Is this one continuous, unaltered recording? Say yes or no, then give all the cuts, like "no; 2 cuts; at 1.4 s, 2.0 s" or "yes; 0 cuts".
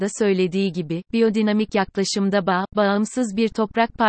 yes; 0 cuts